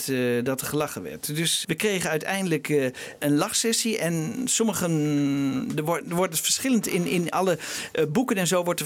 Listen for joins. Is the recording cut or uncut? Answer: cut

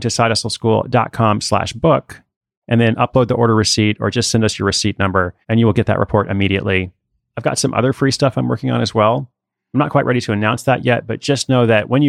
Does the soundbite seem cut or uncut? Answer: cut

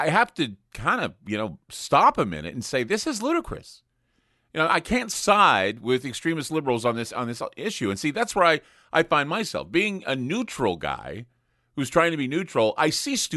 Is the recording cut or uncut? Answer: cut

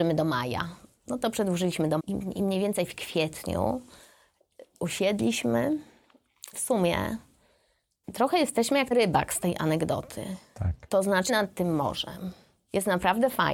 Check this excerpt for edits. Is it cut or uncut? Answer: cut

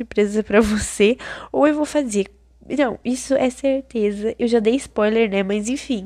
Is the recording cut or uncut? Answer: uncut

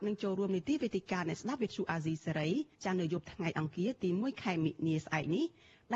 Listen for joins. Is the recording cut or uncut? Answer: cut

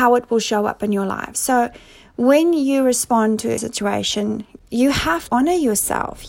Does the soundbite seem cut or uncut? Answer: cut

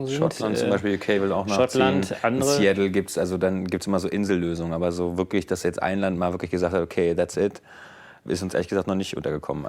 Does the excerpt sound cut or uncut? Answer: uncut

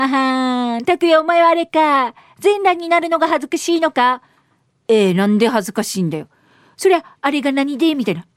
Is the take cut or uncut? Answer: uncut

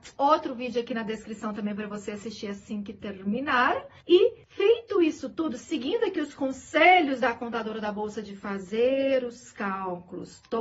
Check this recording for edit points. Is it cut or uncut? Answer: uncut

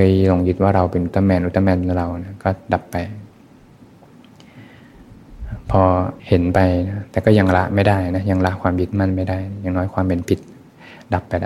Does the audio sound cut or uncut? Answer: cut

